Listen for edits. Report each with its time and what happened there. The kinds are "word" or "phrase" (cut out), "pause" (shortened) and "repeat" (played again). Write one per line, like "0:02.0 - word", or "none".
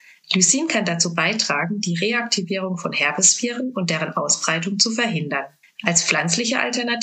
0:05.6 - pause